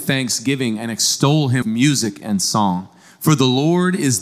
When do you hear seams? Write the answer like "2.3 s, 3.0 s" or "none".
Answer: 1.6 s